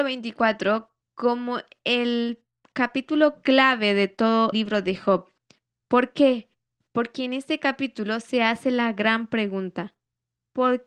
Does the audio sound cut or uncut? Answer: cut